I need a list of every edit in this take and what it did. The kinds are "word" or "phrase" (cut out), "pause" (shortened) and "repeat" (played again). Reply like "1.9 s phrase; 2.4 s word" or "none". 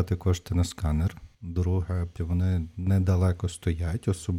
1.3 s pause; 2.2 s word